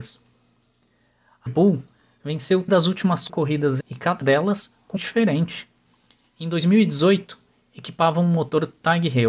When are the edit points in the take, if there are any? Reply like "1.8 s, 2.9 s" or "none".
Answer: 1.5 s, 2.7 s, 3.3 s, 3.8 s, 4.2 s, 5.0 s